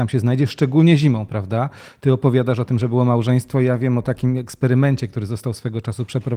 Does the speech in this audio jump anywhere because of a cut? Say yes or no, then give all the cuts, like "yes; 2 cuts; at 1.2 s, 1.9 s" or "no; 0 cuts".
no; 0 cuts